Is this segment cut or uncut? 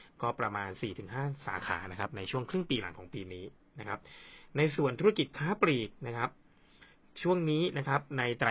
uncut